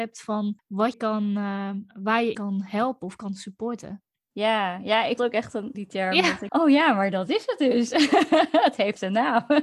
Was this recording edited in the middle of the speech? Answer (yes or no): yes